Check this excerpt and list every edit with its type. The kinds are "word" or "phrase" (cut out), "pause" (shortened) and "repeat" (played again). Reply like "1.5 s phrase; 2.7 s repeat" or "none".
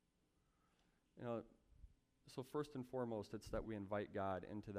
3.6 s word